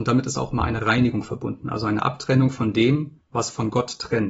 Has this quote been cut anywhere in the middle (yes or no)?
yes